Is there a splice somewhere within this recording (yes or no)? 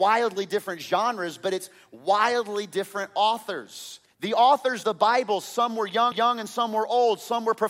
yes